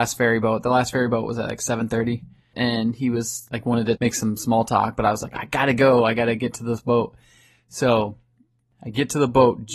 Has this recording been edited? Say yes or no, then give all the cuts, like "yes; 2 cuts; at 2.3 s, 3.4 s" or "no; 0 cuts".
no; 0 cuts